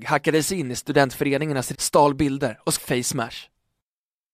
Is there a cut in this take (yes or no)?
yes